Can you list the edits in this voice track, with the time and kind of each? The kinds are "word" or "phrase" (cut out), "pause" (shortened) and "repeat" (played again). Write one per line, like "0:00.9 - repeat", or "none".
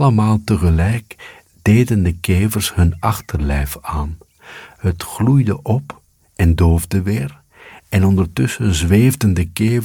none